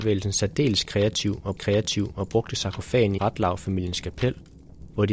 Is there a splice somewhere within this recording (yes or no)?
yes